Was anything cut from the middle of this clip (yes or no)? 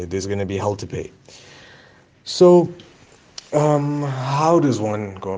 no